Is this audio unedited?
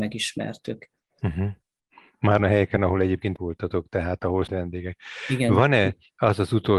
no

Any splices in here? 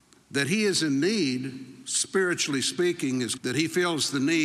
yes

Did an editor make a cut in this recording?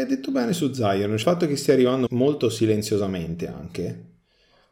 yes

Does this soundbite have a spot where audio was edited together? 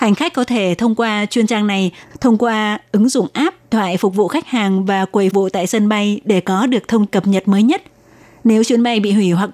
yes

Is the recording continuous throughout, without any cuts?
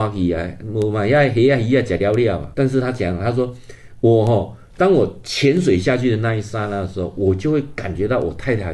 no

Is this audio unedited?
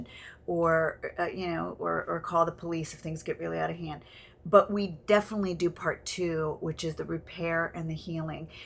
yes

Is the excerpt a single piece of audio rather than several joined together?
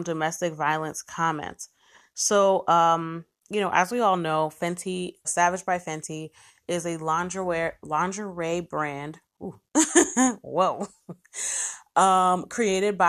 no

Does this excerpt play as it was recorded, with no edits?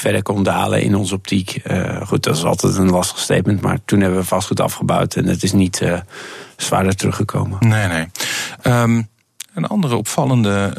yes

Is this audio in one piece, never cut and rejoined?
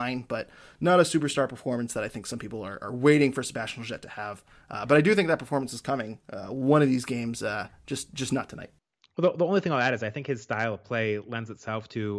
yes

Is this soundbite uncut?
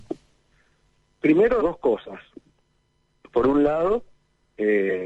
no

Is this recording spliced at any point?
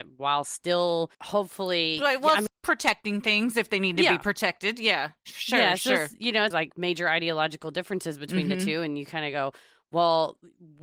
yes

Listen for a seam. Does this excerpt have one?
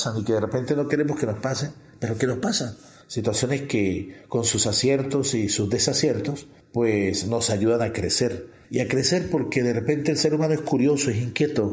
no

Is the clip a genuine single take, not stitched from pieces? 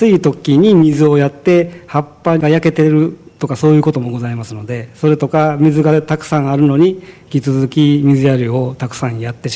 yes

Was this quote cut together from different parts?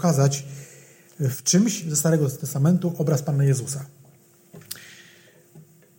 no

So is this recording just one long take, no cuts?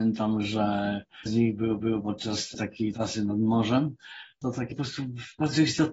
no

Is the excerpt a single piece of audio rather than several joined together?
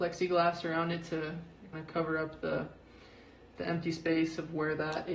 no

